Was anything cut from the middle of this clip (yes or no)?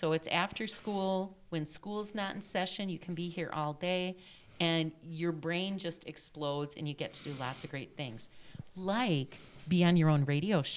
no